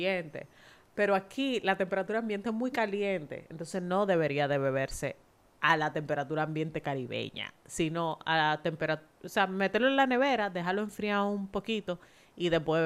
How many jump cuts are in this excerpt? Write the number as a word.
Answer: zero